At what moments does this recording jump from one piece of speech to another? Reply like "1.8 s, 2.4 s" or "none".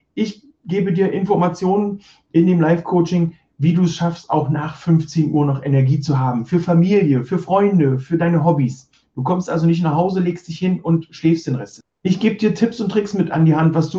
none